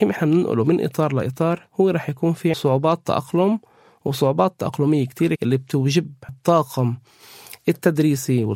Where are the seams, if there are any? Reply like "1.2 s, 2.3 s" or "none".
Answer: 2.5 s, 5.4 s, 6.3 s